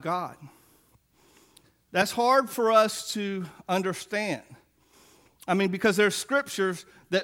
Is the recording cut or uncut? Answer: uncut